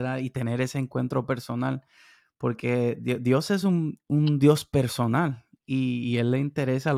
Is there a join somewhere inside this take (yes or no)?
no